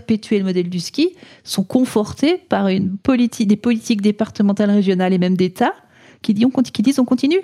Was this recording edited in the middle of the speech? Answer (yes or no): no